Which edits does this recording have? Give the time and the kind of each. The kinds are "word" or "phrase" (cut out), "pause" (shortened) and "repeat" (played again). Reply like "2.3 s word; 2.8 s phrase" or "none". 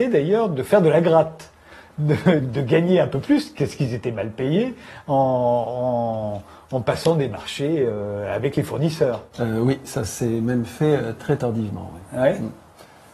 2.4 s word; 11.2 s word